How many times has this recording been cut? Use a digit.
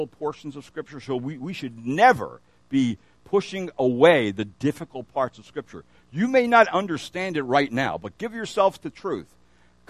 0